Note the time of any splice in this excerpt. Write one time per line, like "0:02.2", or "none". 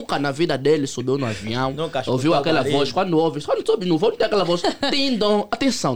none